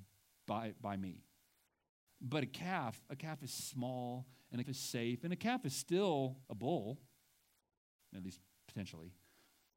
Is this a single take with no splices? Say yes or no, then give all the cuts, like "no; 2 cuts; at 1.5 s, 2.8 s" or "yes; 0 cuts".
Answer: no; 2 cuts; at 4.6 s, 6.4 s